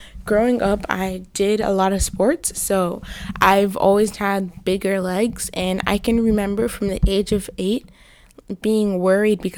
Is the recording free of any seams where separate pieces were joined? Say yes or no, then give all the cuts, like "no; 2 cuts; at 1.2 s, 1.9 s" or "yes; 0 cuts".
yes; 0 cuts